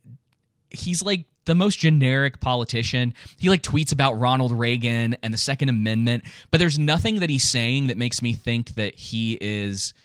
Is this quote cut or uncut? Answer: cut